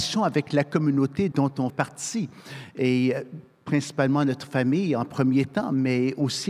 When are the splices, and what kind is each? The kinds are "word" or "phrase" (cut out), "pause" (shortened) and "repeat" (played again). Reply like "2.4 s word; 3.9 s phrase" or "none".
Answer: 1.3 s word; 1.7 s word